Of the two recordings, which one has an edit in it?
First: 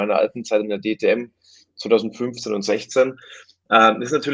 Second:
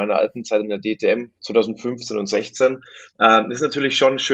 second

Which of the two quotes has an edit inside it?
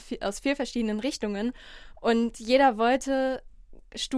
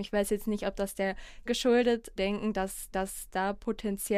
second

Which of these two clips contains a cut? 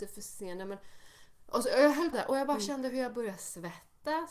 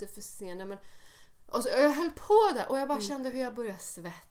first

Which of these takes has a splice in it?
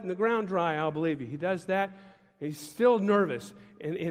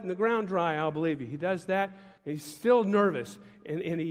second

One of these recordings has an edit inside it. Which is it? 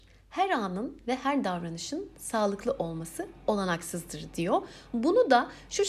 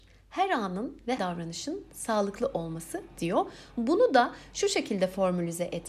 second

